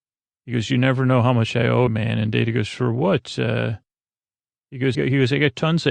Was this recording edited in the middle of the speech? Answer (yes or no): yes